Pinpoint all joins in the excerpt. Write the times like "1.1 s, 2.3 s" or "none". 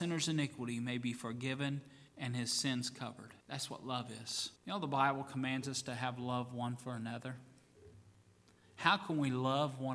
2.1 s, 3.4 s, 4.6 s